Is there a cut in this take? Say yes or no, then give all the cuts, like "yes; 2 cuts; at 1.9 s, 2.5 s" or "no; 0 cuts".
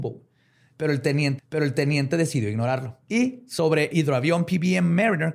yes; 3 cuts; at 1.4 s, 3.0 s, 3.9 s